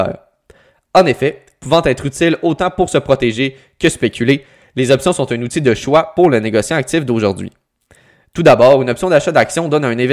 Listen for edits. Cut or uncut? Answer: uncut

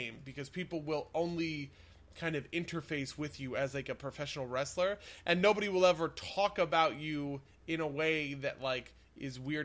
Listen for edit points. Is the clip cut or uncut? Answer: uncut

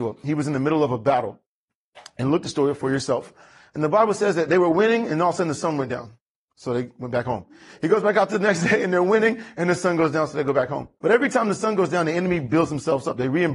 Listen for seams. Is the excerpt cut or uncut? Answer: cut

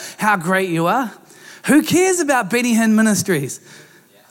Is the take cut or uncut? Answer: uncut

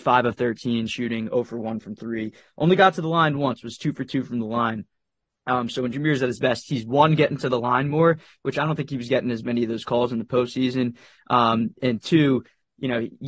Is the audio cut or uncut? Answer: uncut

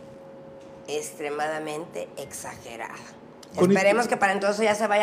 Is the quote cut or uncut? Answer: uncut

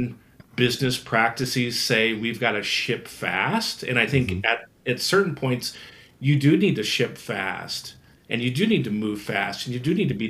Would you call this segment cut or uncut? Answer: uncut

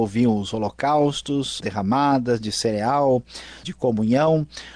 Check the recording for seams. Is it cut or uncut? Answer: cut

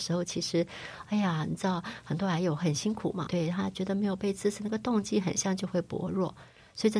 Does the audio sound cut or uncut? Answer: cut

